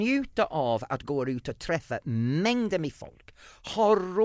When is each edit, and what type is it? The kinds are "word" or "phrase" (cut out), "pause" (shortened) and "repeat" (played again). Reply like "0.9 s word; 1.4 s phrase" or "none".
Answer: none

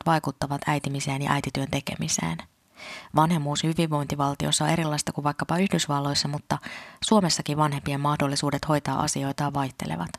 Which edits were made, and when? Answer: none

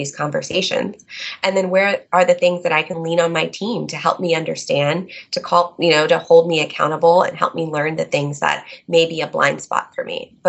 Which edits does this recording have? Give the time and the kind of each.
none

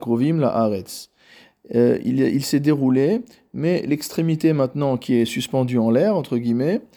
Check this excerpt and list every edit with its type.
none

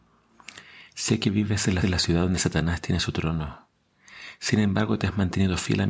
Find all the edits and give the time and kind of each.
1.8 s repeat

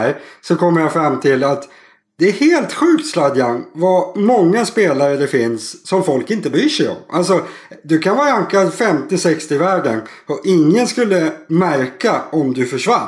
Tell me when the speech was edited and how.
none

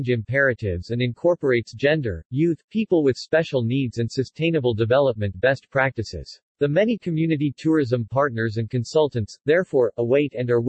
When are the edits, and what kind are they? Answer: 6.5 s pause

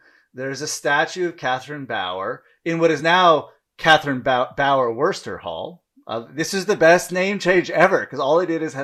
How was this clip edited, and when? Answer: none

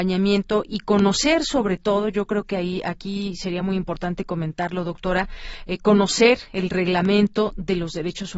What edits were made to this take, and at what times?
none

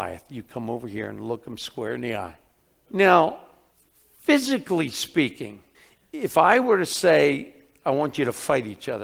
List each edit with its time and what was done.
2.6 s pause; 5.7 s pause

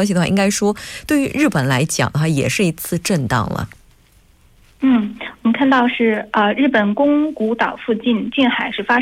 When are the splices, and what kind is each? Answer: none

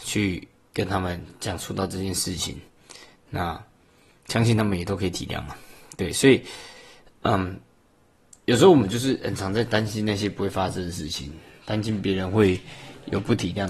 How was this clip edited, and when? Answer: none

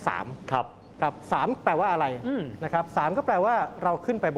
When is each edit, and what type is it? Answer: none

